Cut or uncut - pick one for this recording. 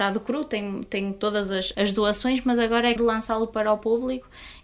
cut